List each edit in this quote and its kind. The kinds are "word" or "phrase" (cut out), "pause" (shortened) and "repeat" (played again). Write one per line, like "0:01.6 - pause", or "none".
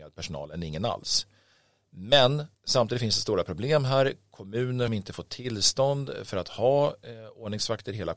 0:02.5 - pause
0:04.9 - word